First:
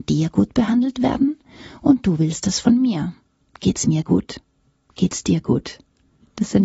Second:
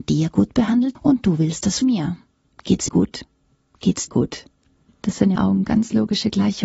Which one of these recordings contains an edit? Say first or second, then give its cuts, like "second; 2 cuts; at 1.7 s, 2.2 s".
second; 5 cuts; at 0.9 s, 1.8 s, 2.9 s, 4.1 s, 5.4 s